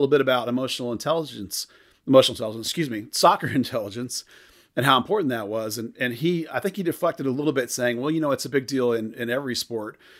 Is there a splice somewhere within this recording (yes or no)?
no